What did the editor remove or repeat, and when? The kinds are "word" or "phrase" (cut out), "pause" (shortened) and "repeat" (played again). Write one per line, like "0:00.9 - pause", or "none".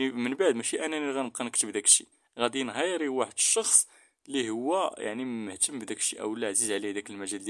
0:02.1 - pause